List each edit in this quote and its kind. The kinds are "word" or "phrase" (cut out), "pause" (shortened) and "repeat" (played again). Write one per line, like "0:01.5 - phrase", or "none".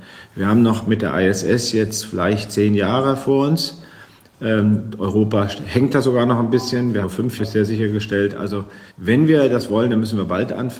0:07.0 - word
0:07.4 - word
0:08.9 - pause

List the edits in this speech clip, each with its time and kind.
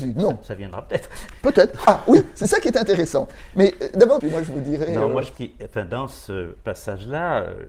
0:04.2 - phrase
0:05.3 - word

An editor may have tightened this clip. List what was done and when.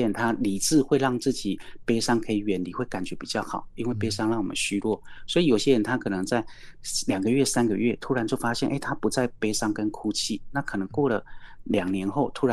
none

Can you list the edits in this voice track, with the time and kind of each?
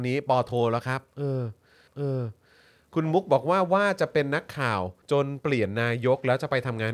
0:01.9 - repeat
0:05.0 - pause

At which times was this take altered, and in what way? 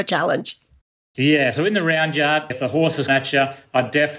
0:02.5 - word
0:03.1 - word

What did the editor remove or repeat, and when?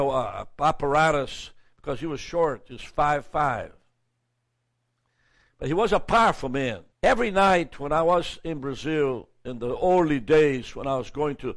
0:06.9 - pause

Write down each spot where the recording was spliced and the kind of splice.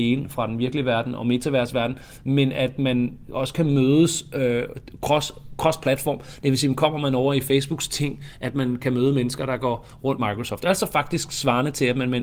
0:10.2 - word

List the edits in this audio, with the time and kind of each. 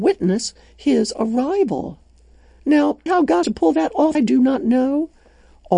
0:03.1 - word
0:03.4 - word
0:04.1 - word

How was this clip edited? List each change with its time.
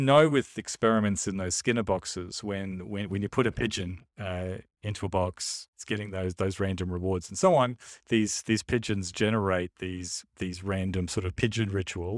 0:04.1 - pause

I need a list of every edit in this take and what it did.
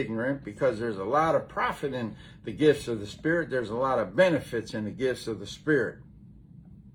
none

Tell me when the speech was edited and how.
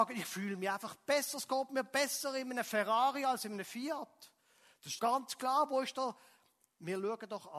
0:05.0 - word

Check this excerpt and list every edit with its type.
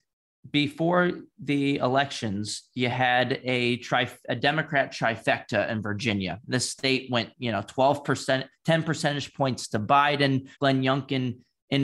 0:10.5 - pause

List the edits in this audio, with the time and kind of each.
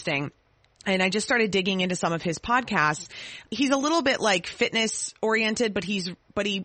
none

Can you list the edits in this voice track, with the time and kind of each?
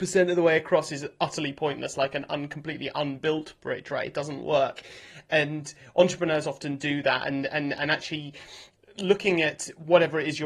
none

